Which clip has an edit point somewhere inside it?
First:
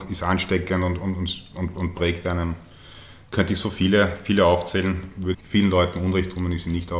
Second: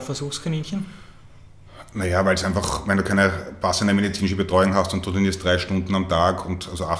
first; 1 cut; at 5.3 s

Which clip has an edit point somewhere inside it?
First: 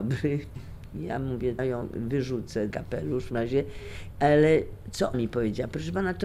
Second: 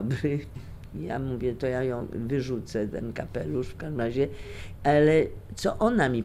first; 4 cuts; at 1.6 s, 2.7 s, 3.3 s, 5.1 s

